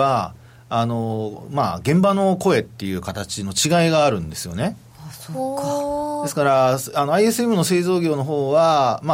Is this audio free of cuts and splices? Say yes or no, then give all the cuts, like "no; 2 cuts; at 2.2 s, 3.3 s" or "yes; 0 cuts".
yes; 0 cuts